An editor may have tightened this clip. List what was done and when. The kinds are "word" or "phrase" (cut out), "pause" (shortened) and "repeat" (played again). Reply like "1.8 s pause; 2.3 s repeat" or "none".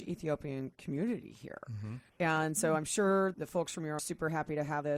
2.1 s pause; 3.3 s word; 4.0 s phrase